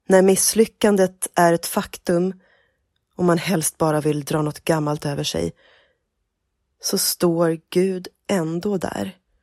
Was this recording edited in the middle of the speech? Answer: no; 0 cuts

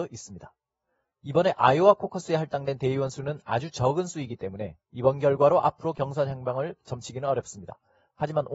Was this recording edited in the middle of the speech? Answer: no; 0 cuts

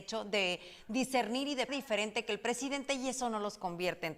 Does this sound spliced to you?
yes; 1 cut; at 1.7 s

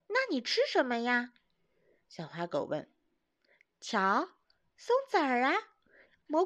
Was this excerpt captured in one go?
yes; 0 cuts

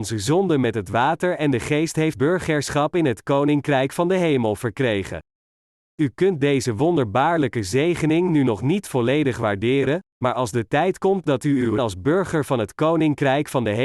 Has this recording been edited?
yes; 2 cuts; at 2.1 s, 11.8 s

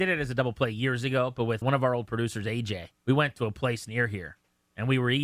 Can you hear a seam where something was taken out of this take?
yes; 2 cuts; at 1.6 s, 3.0 s

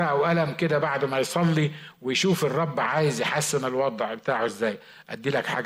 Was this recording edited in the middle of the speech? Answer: no; 0 cuts

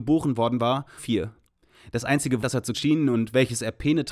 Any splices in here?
yes; 3 cuts; at 1.0 s, 2.4 s, 2.7 s

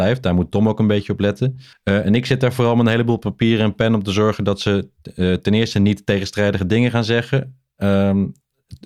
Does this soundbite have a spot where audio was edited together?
yes; 1 cut; at 1.7 s

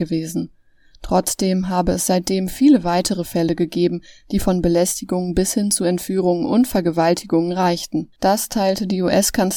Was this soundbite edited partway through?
no; 0 cuts

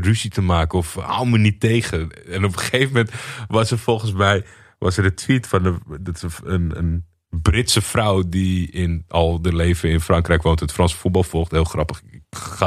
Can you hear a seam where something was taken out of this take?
no; 0 cuts

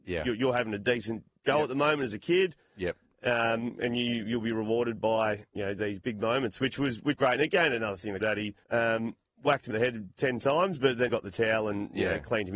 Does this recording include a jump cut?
yes; 7 cuts; at 5.6 s, 6.0 s, 7.1 s, 8.2 s, 8.6 s, 9.7 s, 11.1 s

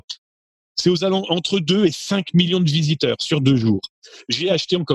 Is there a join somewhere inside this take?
no; 0 cuts

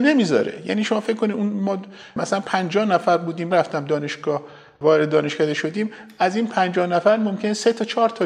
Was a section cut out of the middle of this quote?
yes; 1 cut; at 3.5 s

